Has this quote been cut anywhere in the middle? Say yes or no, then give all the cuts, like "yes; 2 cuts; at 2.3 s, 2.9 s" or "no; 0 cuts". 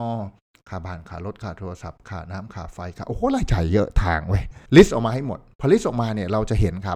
yes; 1 cut; at 4.7 s